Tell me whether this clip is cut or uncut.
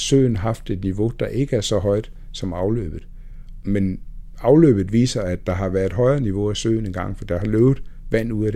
uncut